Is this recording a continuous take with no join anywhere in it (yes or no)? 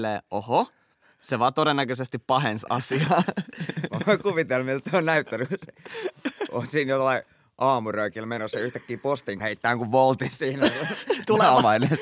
no